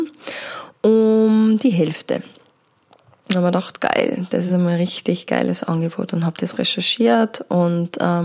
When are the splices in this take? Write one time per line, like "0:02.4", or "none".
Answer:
none

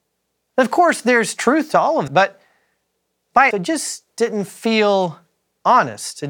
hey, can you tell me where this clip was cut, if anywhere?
0:02.1
0:03.5

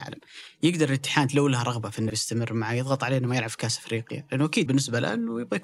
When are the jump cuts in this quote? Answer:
0:02.1
0:04.7

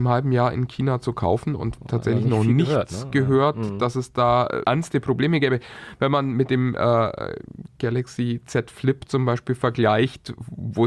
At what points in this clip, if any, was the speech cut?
0:01.8
0:04.6

